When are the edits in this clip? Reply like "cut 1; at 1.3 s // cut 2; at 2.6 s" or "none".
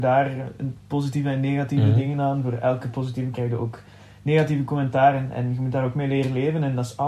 cut 1; at 3.3 s